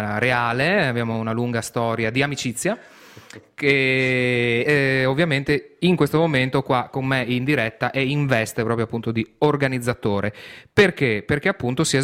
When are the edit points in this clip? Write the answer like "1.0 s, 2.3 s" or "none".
4.7 s

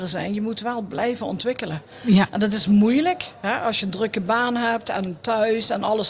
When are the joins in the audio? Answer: none

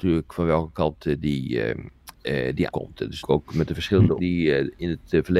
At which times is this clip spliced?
2.7 s, 3.2 s, 4.2 s

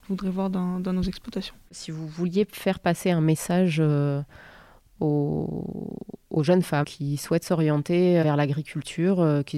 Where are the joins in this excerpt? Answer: 6.8 s, 8.2 s

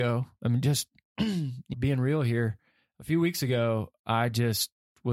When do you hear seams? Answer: 1.7 s

